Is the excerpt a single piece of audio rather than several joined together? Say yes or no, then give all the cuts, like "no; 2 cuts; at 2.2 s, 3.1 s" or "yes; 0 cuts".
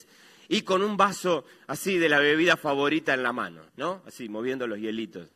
no; 1 cut; at 3.7 s